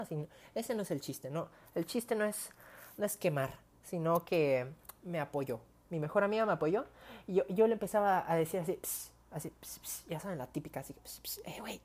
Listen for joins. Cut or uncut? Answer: uncut